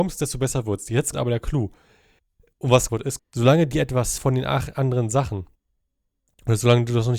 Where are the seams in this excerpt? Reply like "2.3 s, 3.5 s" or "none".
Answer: 1.1 s, 2.9 s, 3.2 s, 4.2 s